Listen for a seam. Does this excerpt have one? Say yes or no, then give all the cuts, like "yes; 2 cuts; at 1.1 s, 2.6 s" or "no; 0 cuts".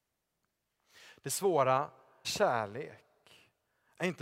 yes; 1 cut; at 2.2 s